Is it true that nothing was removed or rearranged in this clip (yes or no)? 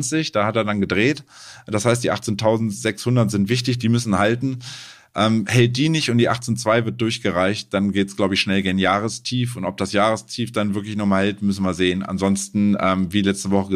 yes